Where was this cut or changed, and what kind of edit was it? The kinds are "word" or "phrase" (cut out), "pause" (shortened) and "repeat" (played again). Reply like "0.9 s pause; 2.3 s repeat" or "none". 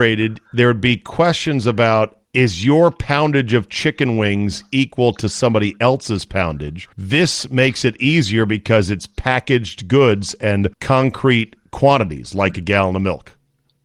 2.2 s pause; 6.9 s pause; 10.7 s pause

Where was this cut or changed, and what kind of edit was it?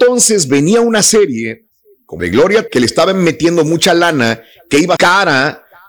2.2 s word; 2.7 s word; 5.0 s word

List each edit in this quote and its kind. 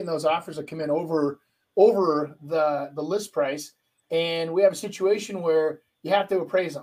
none

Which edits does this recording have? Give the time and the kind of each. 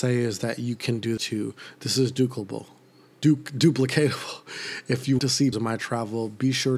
1.2 s word; 5.2 s word; 5.5 s word

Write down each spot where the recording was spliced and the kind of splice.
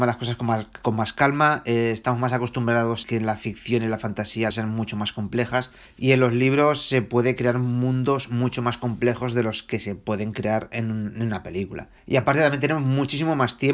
3.0 s word; 4.5 s phrase; 5.9 s pause; 12.0 s pause

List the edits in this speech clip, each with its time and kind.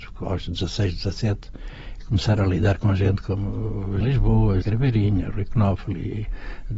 4.0 s word; 4.6 s word

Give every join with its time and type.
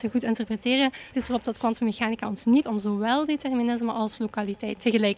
1.1 s word; 2.6 s word

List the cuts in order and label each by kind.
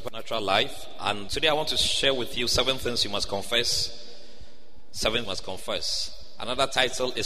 1.3 s word; 5.2 s phrase

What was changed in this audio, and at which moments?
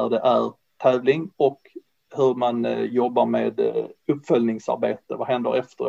none

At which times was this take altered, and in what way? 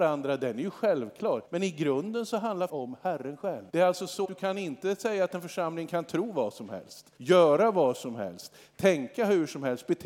1.4 s pause; 2.7 s word; 3.7 s pause; 4.2 s word; 7.2 s pause

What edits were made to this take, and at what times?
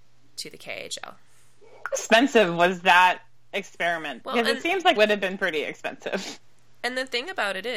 1.9 s word; 4.2 s word; 5.0 s word

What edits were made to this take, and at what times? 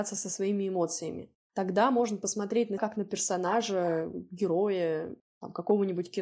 2.8 s word

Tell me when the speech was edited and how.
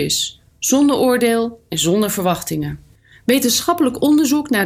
none

